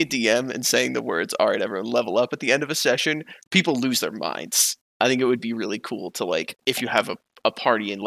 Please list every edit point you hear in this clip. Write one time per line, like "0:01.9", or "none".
none